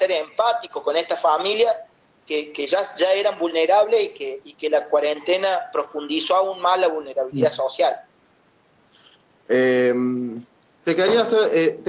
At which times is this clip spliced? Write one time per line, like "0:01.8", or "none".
none